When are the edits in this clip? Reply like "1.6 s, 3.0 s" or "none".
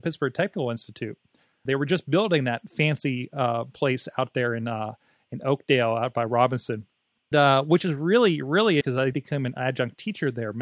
1.6 s, 7.3 s, 8.8 s, 9.1 s